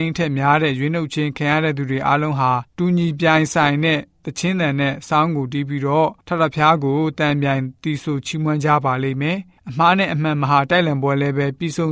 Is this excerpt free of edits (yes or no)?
no